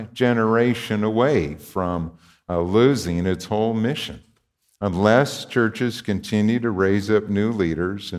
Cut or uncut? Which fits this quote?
uncut